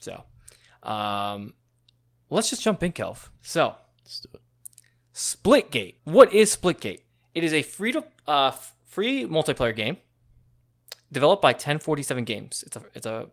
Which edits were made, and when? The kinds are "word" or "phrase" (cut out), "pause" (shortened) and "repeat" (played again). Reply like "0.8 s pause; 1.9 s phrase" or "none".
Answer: 3.4 s pause; 6.0 s pause; 7.1 s pause